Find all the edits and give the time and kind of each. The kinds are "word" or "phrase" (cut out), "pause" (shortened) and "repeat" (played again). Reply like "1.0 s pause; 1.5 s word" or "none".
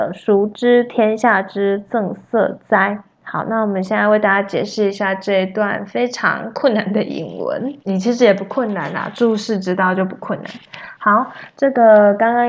3.1 s pause; 7.8 s pause